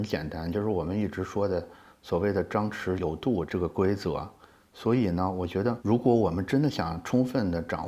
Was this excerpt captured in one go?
yes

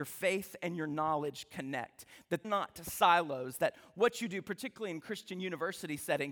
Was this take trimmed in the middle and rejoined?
yes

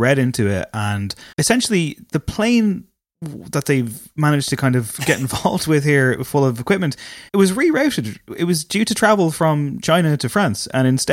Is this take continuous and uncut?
no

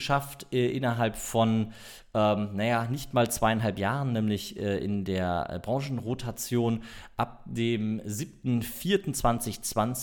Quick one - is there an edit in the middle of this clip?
no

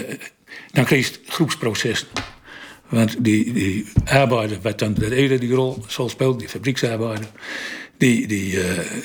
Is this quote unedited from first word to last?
no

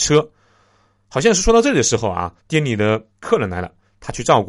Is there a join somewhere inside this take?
yes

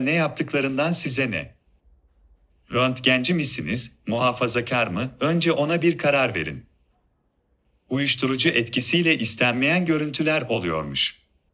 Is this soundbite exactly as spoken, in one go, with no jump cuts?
yes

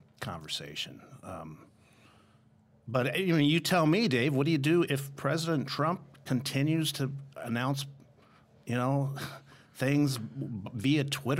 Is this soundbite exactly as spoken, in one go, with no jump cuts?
no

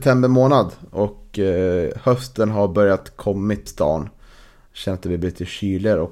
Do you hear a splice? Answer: yes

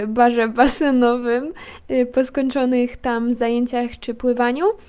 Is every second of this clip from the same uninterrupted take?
yes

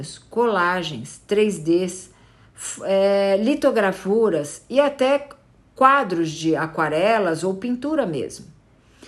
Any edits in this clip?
no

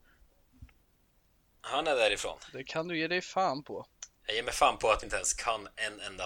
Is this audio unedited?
no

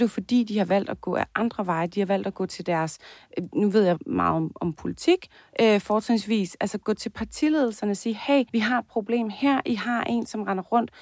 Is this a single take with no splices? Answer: no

